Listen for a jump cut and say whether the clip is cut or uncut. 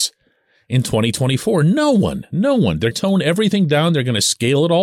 cut